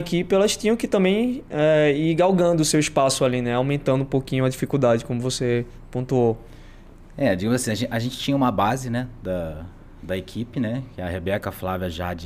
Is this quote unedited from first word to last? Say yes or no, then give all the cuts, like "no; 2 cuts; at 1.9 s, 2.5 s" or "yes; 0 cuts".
yes; 0 cuts